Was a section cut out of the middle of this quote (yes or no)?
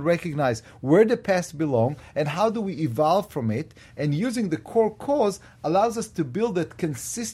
no